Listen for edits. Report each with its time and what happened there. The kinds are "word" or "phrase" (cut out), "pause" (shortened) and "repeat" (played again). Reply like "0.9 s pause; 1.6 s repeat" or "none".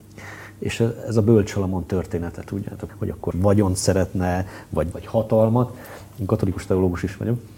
2.9 s word; 3.3 s word; 4.9 s word